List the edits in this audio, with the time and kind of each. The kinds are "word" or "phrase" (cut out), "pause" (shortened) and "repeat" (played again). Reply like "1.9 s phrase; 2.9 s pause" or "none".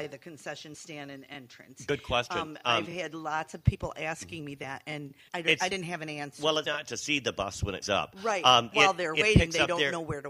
5.3 s pause; 6.6 s word; 7.8 s word; 8.7 s word